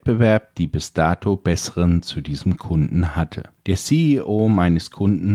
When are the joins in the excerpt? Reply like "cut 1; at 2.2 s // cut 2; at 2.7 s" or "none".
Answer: cut 1; at 2.0 s // cut 2; at 3.6 s